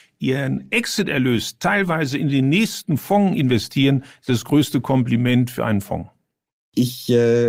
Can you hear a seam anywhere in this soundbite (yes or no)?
no